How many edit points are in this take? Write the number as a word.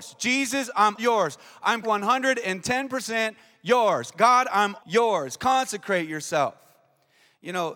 three